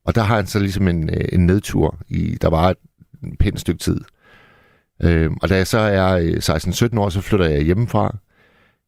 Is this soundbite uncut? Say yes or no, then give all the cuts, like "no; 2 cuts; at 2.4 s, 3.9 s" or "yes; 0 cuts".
yes; 0 cuts